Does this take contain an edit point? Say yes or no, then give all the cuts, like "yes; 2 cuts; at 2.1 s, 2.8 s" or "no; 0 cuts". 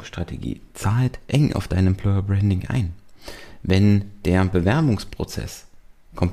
no; 0 cuts